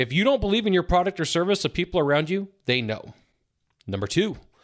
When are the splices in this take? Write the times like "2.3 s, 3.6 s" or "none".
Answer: none